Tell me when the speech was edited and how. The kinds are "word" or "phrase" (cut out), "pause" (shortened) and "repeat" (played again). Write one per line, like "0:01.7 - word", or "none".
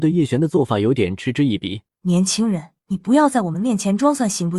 0:01.9 - pause
0:02.8 - pause